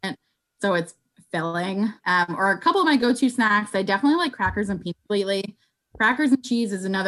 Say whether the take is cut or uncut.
cut